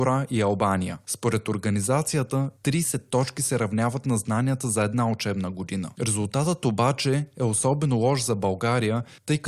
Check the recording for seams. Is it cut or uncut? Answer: uncut